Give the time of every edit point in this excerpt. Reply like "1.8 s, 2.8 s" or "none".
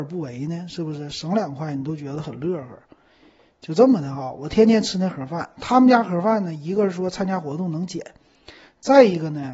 none